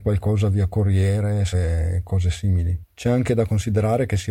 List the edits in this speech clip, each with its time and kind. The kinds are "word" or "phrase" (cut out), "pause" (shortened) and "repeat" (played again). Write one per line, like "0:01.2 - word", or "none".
0:01.5 - phrase